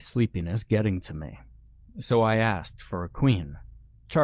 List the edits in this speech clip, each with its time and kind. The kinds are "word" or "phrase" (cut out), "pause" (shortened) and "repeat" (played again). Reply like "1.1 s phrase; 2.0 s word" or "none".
none